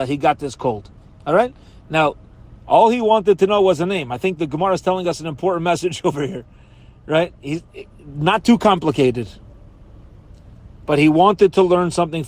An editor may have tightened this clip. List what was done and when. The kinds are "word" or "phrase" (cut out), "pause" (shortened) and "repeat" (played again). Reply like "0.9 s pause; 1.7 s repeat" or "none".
none